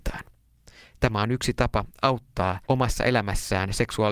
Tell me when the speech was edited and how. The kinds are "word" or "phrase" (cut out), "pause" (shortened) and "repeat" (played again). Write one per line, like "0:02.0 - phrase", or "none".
0:02.6 - pause

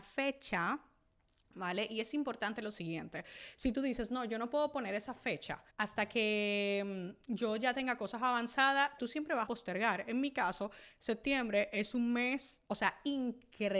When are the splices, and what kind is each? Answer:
0:05.7 - pause
0:09.0 - word
0:09.5 - word
0:12.7 - pause

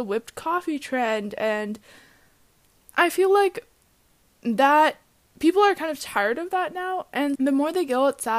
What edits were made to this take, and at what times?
0:07.4 - word

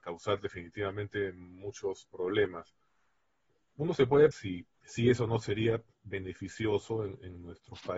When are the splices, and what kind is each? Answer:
0:04.3 - word
0:04.7 - pause

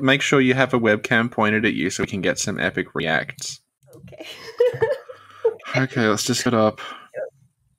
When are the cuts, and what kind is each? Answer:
0:06.5 - word

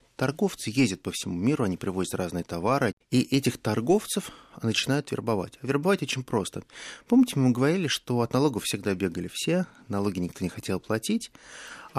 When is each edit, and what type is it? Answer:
none

